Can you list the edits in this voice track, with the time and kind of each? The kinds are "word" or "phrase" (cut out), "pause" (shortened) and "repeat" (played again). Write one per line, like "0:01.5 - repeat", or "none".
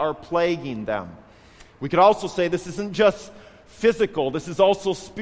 none